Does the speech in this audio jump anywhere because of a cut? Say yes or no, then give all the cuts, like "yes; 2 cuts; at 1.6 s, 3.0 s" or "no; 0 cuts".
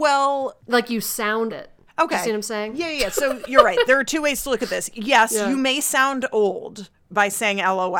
yes; 2 cuts; at 1.5 s, 1.9 s